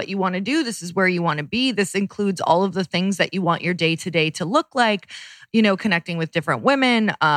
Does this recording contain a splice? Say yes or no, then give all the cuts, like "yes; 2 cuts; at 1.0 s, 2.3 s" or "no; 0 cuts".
no; 0 cuts